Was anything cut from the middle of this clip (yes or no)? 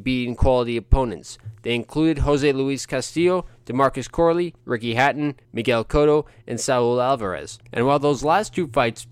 yes